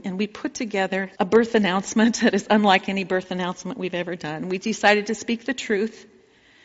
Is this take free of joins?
no; 1 cut; at 1.1 s

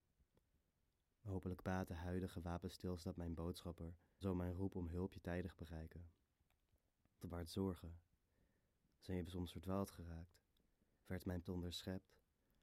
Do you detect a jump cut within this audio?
yes; 4 cuts; at 4.2 s, 7.2 s, 9.2 s, 11.4 s

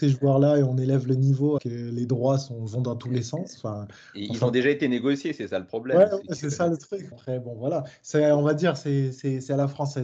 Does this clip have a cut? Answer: yes; 2 cuts; at 1.6 s, 7.1 s

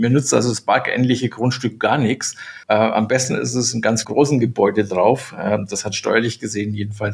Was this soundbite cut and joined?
yes; 2 cuts; at 2.6 s, 4.0 s

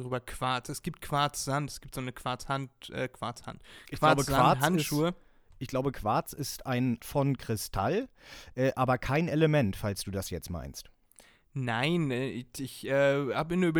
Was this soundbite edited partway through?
yes; 1 cut; at 7.0 s

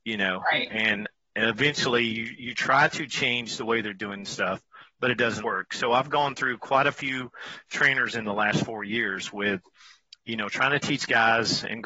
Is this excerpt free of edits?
no; 1 cut; at 5.4 s

